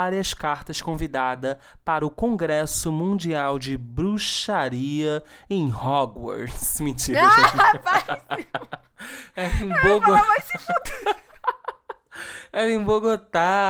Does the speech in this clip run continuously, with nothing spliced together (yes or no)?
yes